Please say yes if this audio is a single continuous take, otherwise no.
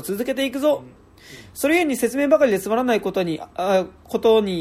no